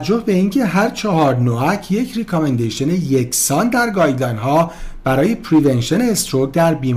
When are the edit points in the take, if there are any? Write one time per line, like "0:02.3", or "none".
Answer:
none